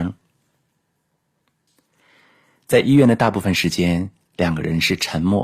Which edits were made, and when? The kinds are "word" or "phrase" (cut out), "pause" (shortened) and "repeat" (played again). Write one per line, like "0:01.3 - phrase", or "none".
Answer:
none